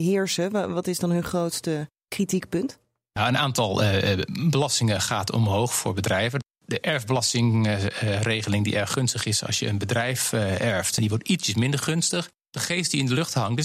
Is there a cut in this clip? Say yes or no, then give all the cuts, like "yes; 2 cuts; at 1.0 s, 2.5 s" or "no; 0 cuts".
no; 0 cuts